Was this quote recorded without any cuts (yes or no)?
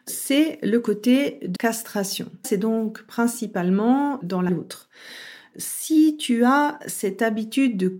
no